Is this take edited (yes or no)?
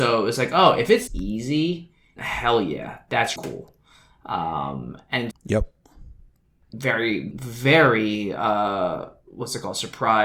yes